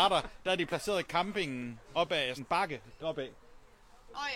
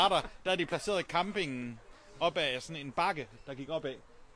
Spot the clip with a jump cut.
first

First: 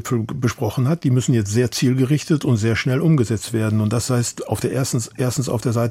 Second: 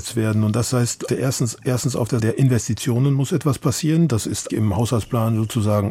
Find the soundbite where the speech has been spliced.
second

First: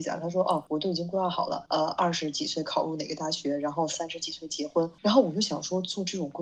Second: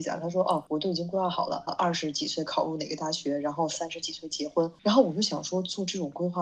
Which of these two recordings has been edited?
second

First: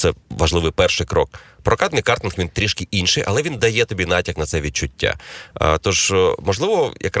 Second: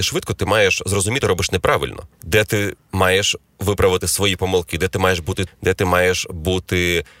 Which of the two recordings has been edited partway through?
second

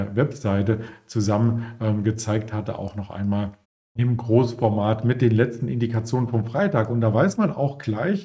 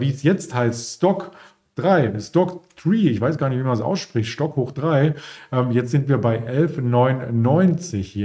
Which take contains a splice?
first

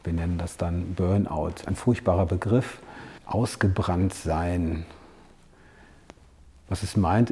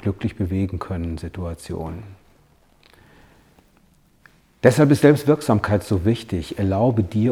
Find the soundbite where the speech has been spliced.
first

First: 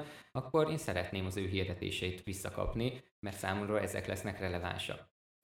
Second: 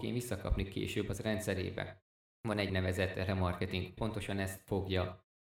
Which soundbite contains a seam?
second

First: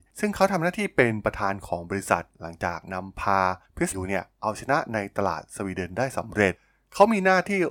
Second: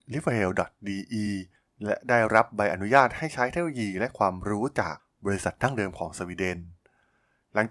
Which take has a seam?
first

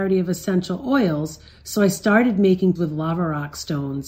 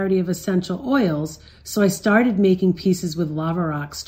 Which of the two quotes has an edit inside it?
first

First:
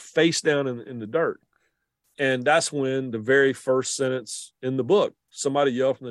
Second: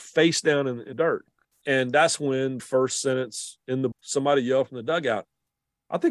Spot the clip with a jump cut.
second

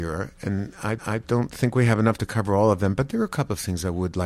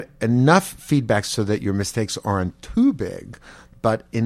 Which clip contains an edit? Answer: first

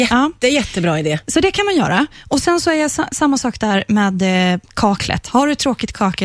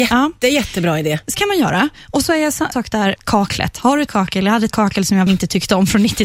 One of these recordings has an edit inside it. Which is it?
second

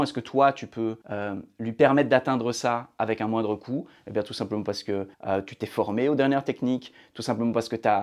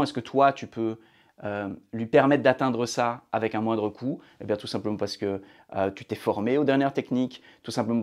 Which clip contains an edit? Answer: first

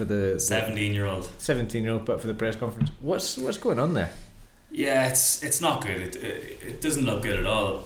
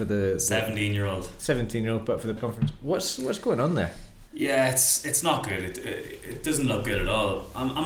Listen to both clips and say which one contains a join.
second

